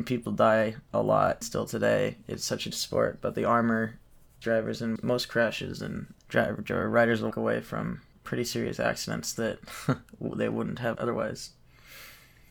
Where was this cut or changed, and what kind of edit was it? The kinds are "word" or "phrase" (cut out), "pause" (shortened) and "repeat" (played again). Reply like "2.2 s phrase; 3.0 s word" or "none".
1.4 s word; 2.7 s word; 4.4 s word; 5.0 s word; 6.2 s pause; 7.3 s word; 8.1 s pause; 10.9 s word